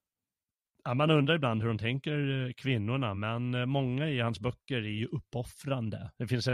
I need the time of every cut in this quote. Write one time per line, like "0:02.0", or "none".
none